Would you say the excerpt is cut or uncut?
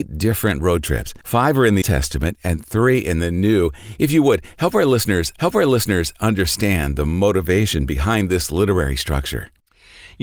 cut